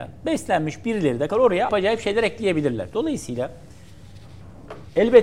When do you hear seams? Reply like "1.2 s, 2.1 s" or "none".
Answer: 1.3 s, 1.7 s